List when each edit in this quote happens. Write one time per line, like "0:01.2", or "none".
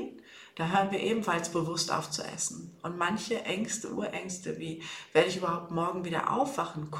none